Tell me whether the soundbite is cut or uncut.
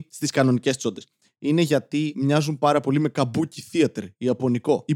uncut